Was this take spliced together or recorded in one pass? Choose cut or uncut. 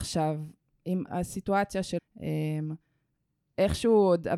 cut